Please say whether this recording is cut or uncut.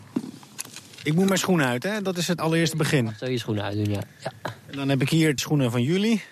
cut